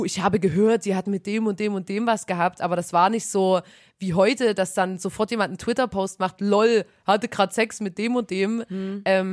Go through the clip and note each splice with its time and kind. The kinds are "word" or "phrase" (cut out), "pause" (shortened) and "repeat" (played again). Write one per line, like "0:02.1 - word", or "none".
none